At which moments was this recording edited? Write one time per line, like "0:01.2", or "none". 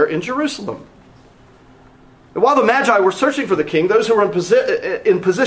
none